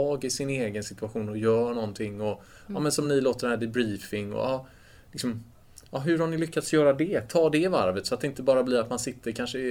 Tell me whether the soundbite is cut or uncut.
uncut